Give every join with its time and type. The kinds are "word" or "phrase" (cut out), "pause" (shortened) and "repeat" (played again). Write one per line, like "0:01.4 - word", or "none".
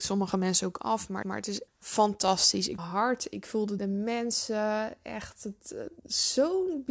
0:01.2 - repeat
0:01.7 - word
0:02.8 - phrase
0:03.8 - phrase